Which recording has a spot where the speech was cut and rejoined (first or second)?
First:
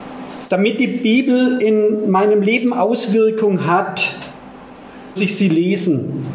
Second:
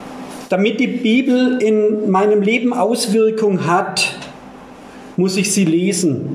first